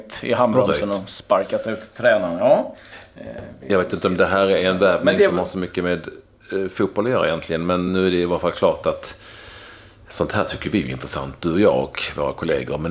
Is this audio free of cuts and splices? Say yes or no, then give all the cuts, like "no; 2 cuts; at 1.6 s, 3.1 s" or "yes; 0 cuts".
yes; 0 cuts